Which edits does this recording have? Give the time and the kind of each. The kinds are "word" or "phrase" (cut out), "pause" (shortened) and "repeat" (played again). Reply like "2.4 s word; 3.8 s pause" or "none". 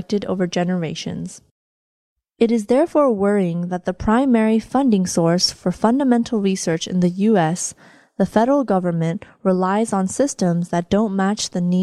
none